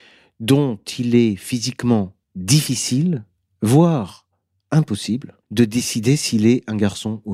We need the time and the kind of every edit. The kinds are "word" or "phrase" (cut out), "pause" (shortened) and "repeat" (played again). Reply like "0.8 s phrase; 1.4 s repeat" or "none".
2.2 s pause; 5.4 s pause